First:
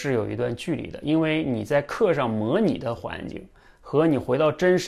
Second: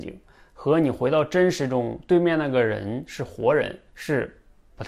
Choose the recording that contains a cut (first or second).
second